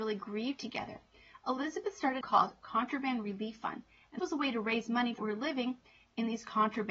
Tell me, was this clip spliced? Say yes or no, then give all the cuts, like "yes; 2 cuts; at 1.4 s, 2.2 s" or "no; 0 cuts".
yes; 3 cuts; at 2.2 s, 4.2 s, 5.2 s